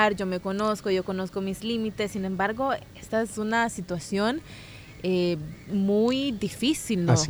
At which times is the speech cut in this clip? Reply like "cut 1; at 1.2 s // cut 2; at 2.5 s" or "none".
none

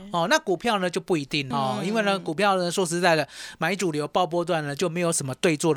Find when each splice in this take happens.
cut 1; at 1.5 s

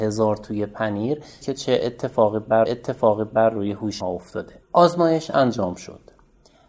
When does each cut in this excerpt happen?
cut 1; at 1.4 s // cut 2; at 2.7 s // cut 3; at 4.0 s // cut 4; at 4.6 s

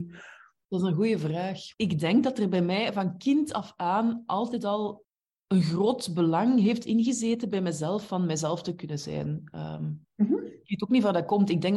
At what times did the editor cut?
cut 1; at 1.7 s // cut 2; at 5.1 s

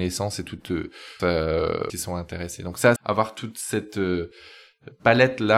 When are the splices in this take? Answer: cut 1; at 1.2 s // cut 2; at 1.9 s // cut 3; at 3.0 s

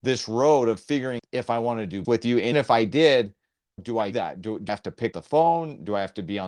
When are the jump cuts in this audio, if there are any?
cut 1; at 1.2 s // cut 2; at 2.0 s // cut 3; at 2.5 s // cut 4; at 3.8 s // cut 5; at 4.1 s // cut 6; at 4.7 s // cut 7; at 5.1 s

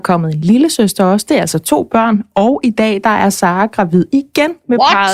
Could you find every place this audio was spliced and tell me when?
none

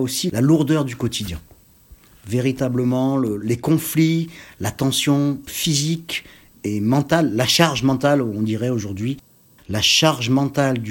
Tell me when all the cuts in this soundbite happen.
none

